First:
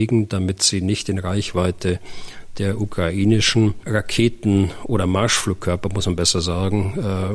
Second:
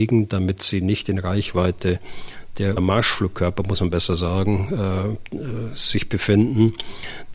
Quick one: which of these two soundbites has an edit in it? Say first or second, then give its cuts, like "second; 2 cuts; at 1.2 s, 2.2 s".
second; 1 cut; at 2.8 s